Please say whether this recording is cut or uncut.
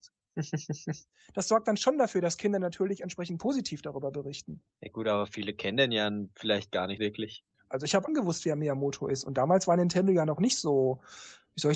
cut